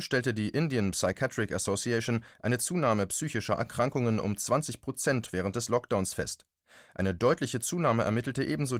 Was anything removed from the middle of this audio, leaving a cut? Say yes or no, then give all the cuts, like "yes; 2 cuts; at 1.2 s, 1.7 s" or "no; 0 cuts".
no; 0 cuts